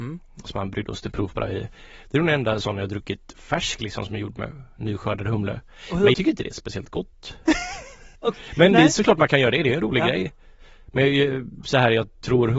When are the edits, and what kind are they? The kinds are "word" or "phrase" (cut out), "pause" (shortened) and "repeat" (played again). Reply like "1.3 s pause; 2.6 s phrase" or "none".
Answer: 6.1 s word; 8.1 s pause